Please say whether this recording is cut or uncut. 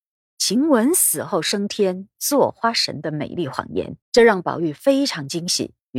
cut